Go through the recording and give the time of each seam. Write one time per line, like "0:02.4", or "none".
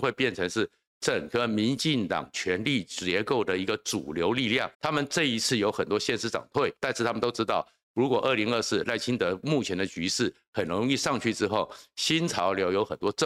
0:04.7
0:06.8